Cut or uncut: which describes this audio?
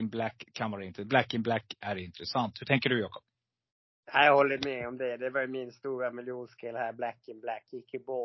uncut